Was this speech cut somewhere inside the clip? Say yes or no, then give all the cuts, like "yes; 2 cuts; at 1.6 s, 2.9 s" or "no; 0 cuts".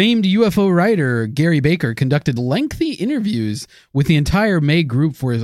no; 0 cuts